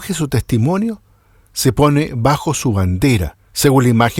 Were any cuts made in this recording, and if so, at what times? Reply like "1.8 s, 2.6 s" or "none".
none